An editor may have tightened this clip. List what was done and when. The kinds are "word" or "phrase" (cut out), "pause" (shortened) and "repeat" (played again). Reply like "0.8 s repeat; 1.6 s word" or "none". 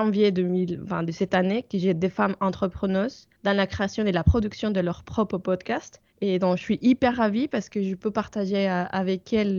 3.3 s pause; 6.1 s pause